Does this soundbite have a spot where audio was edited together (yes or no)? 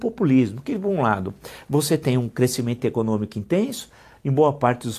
no